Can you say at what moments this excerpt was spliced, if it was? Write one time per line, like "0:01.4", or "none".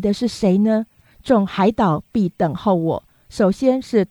none